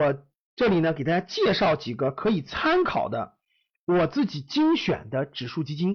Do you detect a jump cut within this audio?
no; 0 cuts

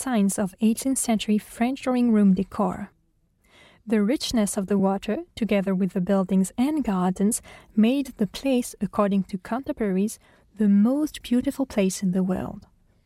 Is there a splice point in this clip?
no; 0 cuts

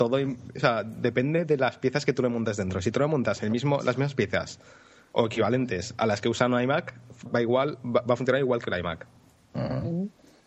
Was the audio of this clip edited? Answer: yes; 1 cut; at 7.3 s

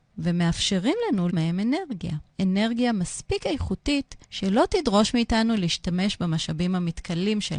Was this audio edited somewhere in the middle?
yes; 3 cuts; at 1.3 s, 2.3 s, 4.2 s

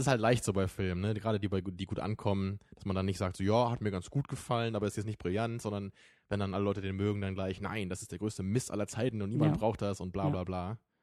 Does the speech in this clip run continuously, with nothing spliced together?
yes; 0 cuts

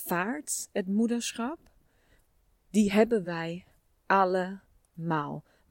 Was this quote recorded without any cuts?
yes; 0 cuts

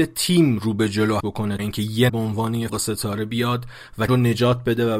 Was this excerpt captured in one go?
no; 5 cuts; at 1.2 s, 1.6 s, 2.1 s, 2.7 s, 4.1 s

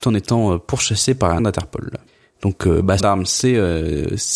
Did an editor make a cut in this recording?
yes; 3 cuts; at 1.4 s, 2.1 s, 3.0 s

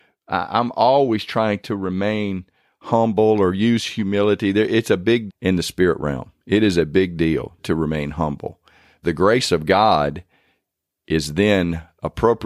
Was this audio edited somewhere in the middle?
yes; 4 cuts; at 1.6 s, 5.3 s, 7.6 s, 9.0 s

